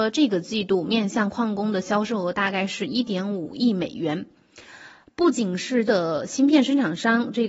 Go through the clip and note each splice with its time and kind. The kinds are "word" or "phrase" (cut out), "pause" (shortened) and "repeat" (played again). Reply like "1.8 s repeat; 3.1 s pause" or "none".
5.9 s word